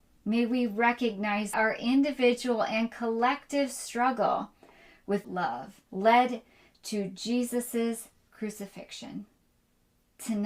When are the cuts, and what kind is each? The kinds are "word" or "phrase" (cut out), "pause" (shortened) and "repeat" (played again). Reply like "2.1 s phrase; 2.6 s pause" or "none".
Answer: 1.5 s word; 5.2 s word; 5.9 s pause